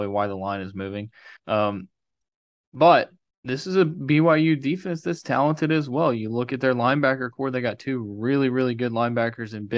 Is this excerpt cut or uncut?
cut